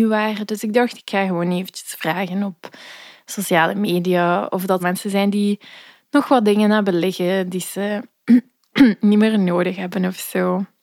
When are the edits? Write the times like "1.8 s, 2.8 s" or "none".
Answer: 4.8 s